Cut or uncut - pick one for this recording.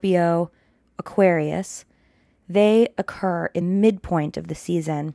cut